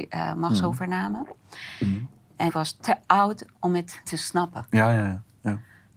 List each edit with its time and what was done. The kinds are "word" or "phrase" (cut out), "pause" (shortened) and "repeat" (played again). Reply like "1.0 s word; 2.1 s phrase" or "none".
2.5 s word; 4.0 s word